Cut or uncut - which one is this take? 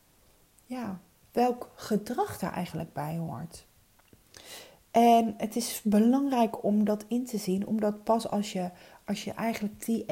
uncut